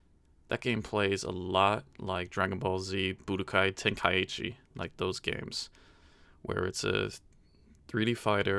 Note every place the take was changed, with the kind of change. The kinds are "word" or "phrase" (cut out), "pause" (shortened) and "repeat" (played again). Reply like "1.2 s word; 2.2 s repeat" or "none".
none